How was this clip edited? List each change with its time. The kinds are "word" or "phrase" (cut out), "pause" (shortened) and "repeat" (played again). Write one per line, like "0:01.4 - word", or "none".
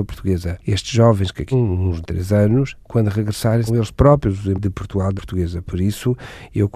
0:01.5 - word
0:02.0 - word
0:03.7 - word
0:04.6 - word
0:05.2 - word